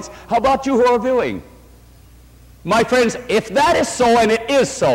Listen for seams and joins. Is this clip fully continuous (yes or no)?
yes